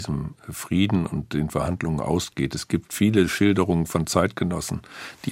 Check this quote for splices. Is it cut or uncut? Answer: uncut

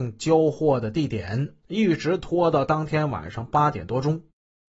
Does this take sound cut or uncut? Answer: cut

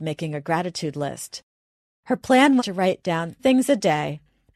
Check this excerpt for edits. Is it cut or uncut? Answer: cut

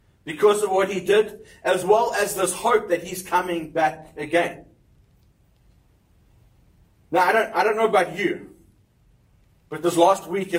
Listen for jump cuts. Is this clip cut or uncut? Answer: uncut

